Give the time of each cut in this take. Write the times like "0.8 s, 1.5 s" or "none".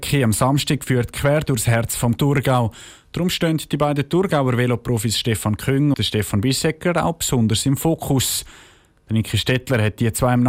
2.2 s, 5.9 s